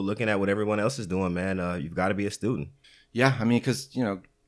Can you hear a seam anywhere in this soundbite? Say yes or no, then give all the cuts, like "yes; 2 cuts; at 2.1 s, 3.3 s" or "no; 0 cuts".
yes; 1 cut; at 2.8 s